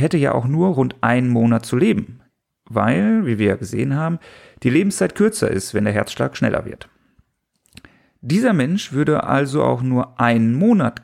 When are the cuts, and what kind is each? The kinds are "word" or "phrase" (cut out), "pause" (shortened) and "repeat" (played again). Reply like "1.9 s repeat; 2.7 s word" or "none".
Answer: none

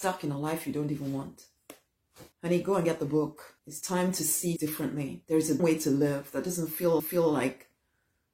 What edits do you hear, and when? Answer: 2.3 s pause; 3.6 s pause; 4.6 s word; 5.2 s pause; 5.6 s word; 7.0 s repeat

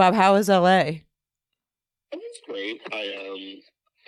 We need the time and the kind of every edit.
none

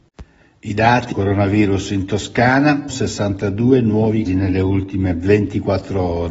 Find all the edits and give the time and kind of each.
1.1 s word; 2.9 s word; 4.3 s word

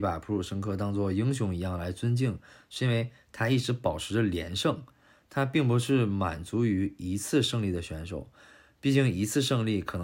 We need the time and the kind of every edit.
none

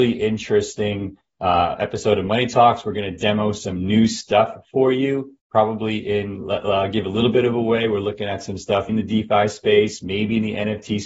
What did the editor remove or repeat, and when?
5.4 s pause; 8.9 s word

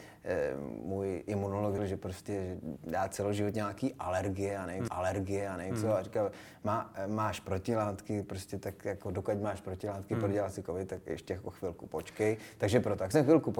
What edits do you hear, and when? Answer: 1.8 s word; 4.9 s repeat

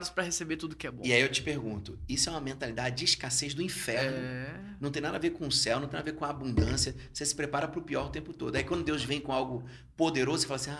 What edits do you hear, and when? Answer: none

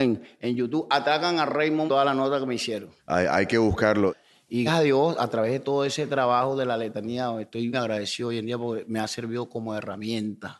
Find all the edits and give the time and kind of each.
1.9 s phrase; 3.0 s pause; 4.7 s word; 7.7 s word

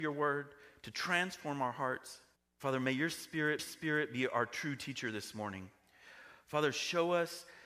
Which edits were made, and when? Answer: 2.4 s pause; 3.6 s repeat

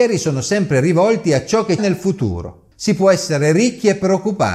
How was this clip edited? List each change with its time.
1.8 s phrase

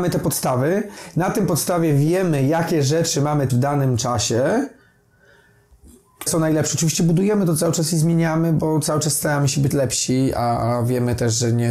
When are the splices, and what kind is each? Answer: 3.5 s word; 6.3 s word; 9.7 s word

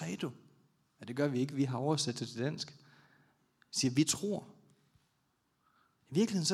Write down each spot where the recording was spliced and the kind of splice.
none

